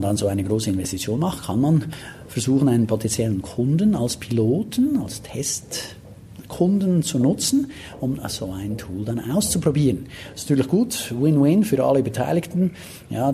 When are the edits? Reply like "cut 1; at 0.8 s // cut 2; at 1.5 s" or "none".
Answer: none